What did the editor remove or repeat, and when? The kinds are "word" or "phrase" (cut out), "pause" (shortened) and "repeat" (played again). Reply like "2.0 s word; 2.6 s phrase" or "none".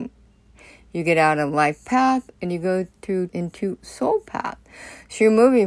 3.3 s phrase